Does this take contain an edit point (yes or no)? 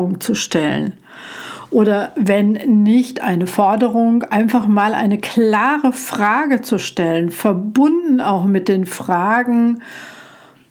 no